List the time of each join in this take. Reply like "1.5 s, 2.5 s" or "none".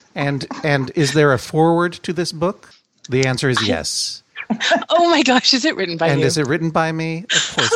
none